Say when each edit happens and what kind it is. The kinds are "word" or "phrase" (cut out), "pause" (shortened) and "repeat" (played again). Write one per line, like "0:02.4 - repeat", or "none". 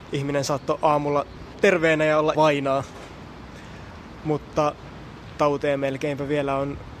0:01.5 - word
0:02.3 - word
0:05.4 - word